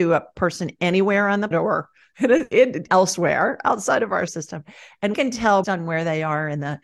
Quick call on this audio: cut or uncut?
cut